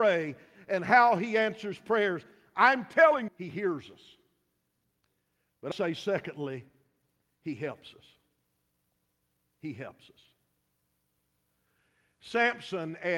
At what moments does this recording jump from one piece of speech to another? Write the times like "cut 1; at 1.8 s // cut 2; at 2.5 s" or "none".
cut 1; at 3.3 s // cut 2; at 5.7 s